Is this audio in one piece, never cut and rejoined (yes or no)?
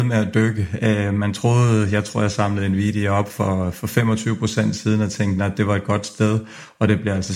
yes